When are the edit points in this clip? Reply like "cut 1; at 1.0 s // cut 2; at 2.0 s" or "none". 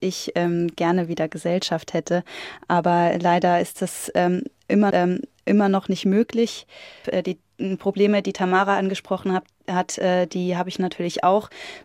cut 1; at 4.9 s